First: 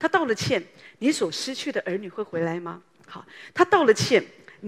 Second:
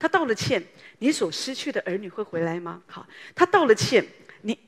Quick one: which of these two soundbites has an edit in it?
second; 1 cut; at 2.9 s

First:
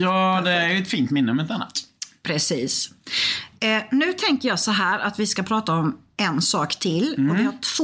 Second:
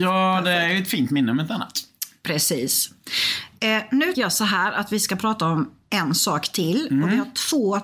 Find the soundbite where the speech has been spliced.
second; 1 cut; at 4.1 s

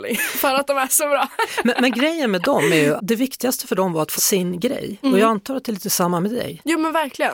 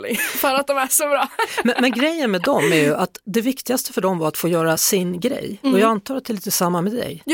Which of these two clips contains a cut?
first; 2 cuts; at 3.0 s, 4.2 s

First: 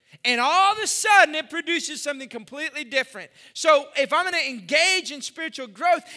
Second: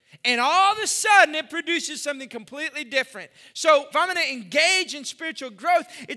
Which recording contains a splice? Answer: second; 1 cut; at 3.9 s

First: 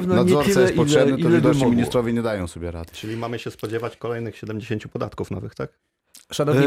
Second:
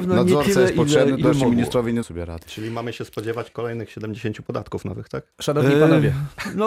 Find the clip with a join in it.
second; 3 cuts; at 1.2 s, 2.0 s, 5.3 s

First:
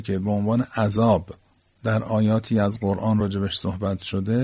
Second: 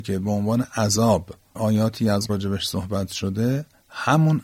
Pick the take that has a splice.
second; 2 cuts; at 1.5 s, 2.3 s

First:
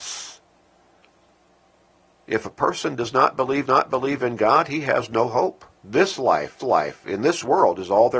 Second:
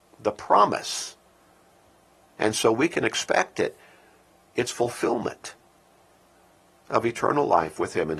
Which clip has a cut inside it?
first; 3 cuts; at 3.7 s, 5.7 s, 6.6 s

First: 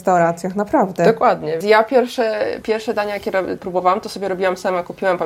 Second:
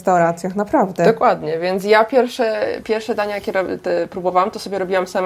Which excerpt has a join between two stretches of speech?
first; 2 cuts; at 1.6 s, 3.6 s

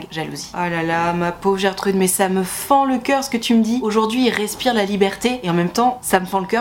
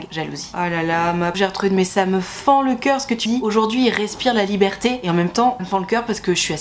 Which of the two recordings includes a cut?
second; 3 cuts; at 1.3 s, 3.3 s, 5.6 s

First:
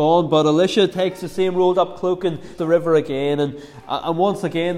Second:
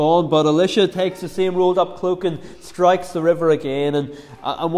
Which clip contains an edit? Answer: first; 1 cut; at 2.6 s

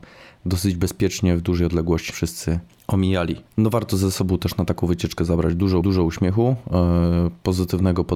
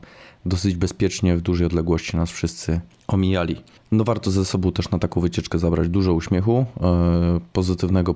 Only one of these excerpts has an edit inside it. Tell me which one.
first; 3 cuts; at 2.1 s, 3.5 s, 5.8 s

